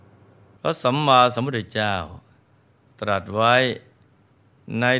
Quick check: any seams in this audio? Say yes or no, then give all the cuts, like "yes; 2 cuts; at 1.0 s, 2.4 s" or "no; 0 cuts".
no; 0 cuts